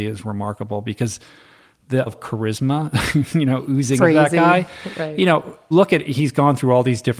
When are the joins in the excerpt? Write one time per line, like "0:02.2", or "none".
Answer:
0:02.1
0:04.0
0:05.7

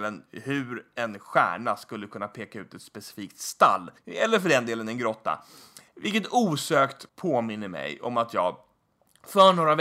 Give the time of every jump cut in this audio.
0:04.0
0:05.9
0:07.1

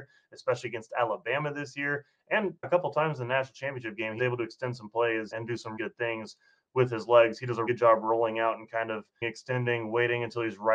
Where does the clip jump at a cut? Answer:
0:02.6
0:04.2
0:05.3
0:05.8
0:07.7
0:09.2

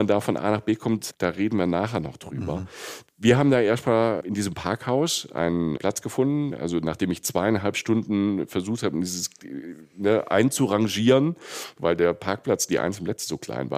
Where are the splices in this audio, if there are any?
0:04.2
0:05.8

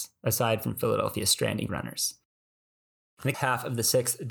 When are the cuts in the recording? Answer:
0:01.7
0:03.3

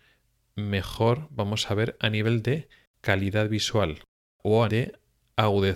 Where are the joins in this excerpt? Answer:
0:04.7

